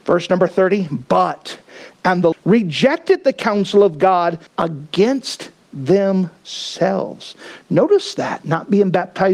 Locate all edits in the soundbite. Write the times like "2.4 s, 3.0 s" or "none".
1.9 s, 2.3 s, 4.5 s

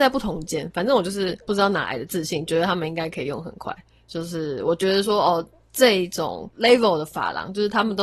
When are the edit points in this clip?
none

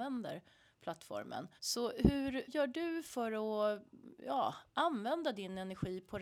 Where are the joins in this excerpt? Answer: 1.6 s, 2.5 s

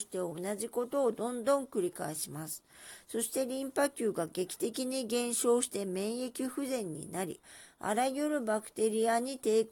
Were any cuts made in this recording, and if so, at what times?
none

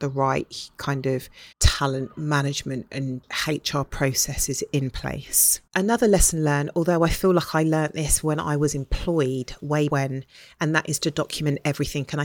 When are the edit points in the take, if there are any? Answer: 1.5 s, 5.7 s, 9.9 s

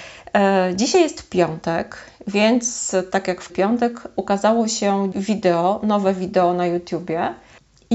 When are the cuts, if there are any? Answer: 3.5 s, 5.1 s

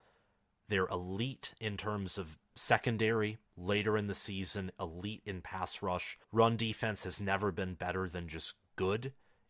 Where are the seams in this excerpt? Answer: 3.4 s, 6.2 s

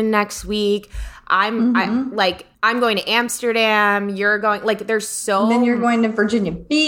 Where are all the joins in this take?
2.5 s

